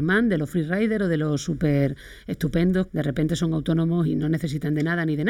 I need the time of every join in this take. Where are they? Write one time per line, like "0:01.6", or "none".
0:02.9
0:04.0